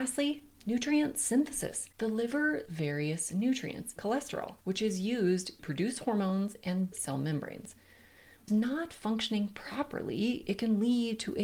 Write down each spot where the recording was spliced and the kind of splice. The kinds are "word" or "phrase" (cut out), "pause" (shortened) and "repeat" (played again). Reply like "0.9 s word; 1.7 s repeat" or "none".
2.7 s word; 4.0 s word; 4.6 s pause; 5.6 s word; 6.9 s word; 8.5 s word